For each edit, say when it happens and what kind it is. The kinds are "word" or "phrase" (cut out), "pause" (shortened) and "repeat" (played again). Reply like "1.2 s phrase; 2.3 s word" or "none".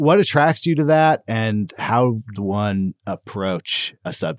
2.4 s word; 3.0 s pause